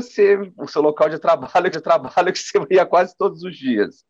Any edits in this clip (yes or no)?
yes